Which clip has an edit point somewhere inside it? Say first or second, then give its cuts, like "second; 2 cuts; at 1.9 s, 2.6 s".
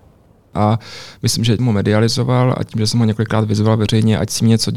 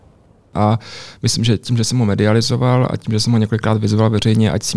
first; 1 cut; at 1.6 s